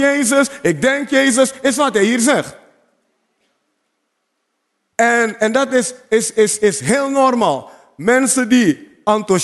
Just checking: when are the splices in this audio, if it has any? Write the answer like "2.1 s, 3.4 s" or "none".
none